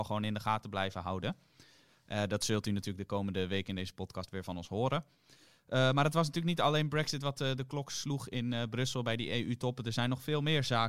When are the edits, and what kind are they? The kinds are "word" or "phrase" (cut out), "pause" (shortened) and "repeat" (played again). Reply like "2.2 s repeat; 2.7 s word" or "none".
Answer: none